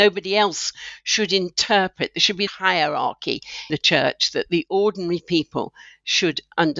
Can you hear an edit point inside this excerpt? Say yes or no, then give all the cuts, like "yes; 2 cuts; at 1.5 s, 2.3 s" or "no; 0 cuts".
yes; 2 cuts; at 2.5 s, 3.7 s